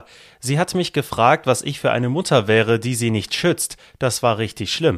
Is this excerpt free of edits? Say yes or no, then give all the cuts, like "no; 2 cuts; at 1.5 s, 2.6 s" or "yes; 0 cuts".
yes; 0 cuts